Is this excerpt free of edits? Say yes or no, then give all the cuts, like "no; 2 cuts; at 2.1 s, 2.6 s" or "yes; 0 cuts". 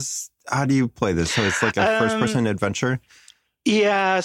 yes; 0 cuts